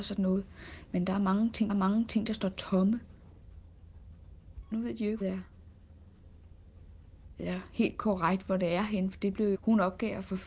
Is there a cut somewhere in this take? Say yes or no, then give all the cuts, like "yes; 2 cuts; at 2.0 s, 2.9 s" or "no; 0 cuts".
yes; 4 cuts; at 1.7 s, 4.7 s, 5.2 s, 9.5 s